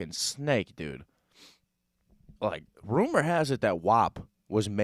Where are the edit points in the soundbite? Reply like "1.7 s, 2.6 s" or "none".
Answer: 2.4 s